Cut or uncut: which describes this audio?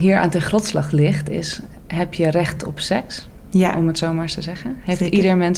uncut